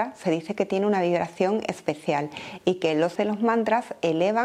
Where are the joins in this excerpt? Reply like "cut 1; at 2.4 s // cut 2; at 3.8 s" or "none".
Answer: cut 1; at 3.2 s